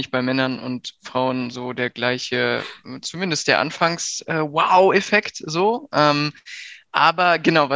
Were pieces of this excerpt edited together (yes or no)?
no